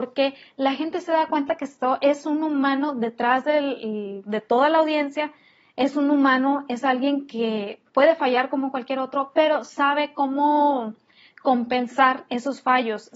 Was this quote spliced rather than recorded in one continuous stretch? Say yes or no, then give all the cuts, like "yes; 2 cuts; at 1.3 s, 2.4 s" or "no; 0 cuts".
no; 0 cuts